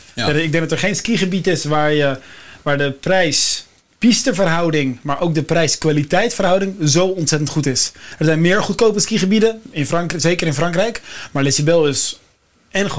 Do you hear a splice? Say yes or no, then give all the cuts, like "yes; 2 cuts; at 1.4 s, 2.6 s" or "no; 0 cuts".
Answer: no; 0 cuts